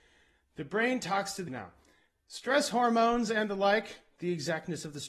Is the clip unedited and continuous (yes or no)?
no